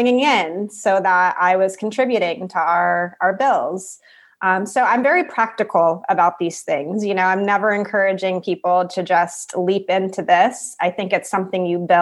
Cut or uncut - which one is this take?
uncut